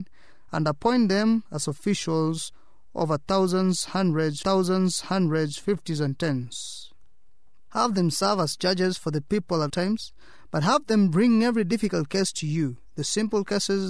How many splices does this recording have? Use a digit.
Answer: 2